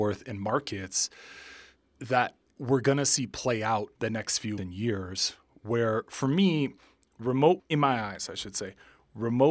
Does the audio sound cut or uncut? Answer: cut